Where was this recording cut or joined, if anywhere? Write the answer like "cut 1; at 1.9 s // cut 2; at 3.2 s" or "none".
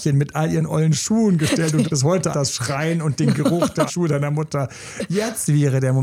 cut 1; at 1.8 s // cut 2; at 2.3 s // cut 3; at 3.9 s